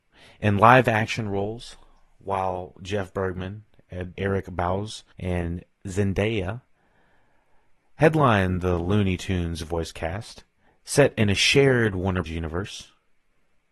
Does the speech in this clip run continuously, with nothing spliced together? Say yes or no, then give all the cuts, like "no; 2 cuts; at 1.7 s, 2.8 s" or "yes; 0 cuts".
no; 4 cuts; at 4.1 s, 5.1 s, 10.7 s, 12.3 s